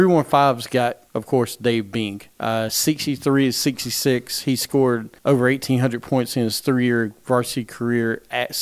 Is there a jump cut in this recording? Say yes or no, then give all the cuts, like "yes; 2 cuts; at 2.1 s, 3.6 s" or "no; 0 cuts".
yes; 3 cuts; at 1.1 s, 2.3 s, 5.2 s